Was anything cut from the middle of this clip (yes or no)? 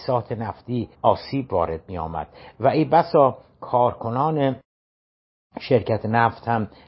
yes